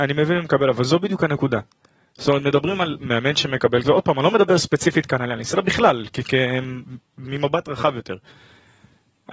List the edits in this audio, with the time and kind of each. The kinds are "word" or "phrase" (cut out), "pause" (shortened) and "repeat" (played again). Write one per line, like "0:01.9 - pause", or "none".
0:03.8 - word